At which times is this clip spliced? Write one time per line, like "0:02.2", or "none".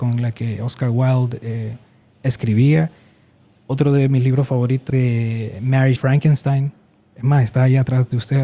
0:04.9
0:06.0

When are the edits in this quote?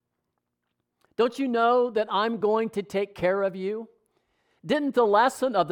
none

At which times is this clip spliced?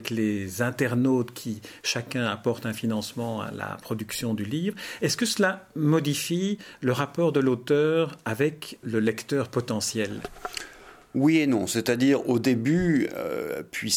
0:08.8

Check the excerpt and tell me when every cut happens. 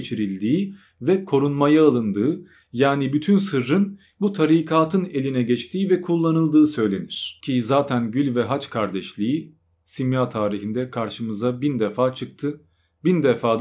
none

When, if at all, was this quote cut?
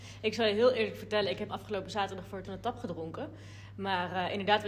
0:01.5
0:02.4

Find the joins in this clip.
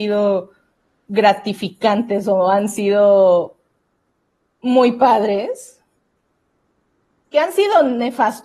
none

